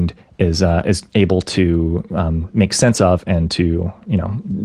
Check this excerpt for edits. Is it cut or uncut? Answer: uncut